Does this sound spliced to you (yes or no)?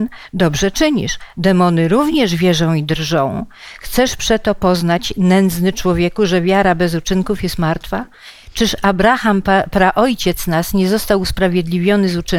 no